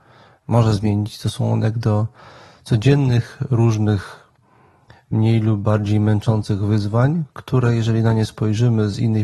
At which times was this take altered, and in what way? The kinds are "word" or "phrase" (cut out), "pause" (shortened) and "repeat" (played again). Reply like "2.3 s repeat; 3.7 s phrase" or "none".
none

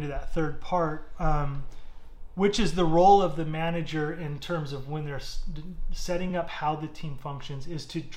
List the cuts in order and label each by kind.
none

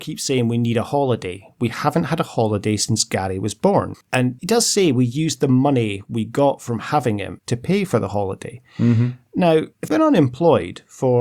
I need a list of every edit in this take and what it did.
9.9 s word

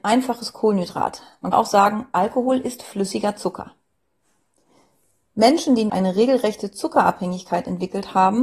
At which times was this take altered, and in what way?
1.5 s word; 5.9 s phrase

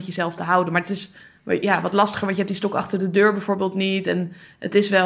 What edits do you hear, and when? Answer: none

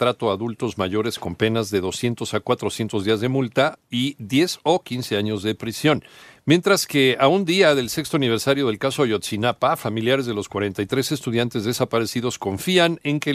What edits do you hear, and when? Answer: none

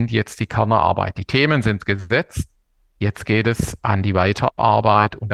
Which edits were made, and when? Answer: none

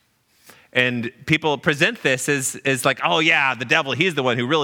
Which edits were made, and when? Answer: none

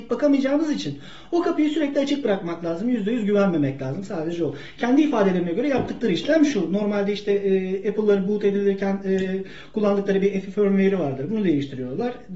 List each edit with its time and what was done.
none

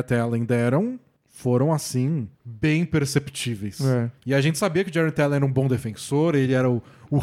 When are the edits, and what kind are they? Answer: 2.3 s pause; 4.2 s pause

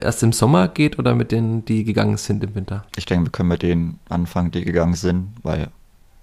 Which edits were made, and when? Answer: 2.9 s pause

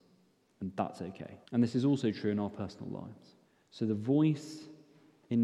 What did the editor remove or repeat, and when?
1.4 s pause; 3.4 s pause

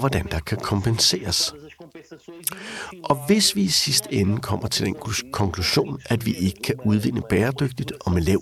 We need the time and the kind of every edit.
none

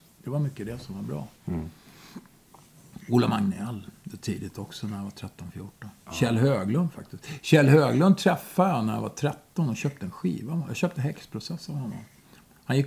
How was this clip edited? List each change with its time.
1.4 s pause

